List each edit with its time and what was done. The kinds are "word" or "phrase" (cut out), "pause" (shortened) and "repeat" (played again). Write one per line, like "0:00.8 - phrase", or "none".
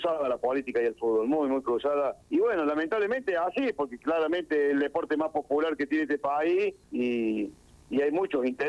0:02.2 - pause
0:06.8 - pause